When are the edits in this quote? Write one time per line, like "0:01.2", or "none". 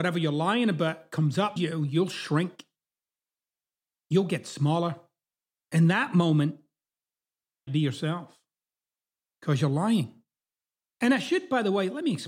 0:01.6
0:07.7